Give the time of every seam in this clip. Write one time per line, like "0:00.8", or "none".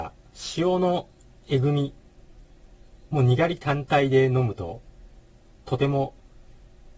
none